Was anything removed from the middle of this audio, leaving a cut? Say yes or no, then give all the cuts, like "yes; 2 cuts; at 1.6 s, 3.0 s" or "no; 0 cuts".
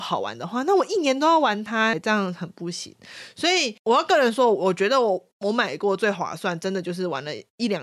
yes; 1 cut; at 1.9 s